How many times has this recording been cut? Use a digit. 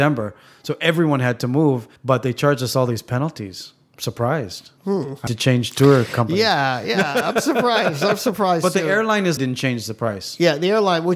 4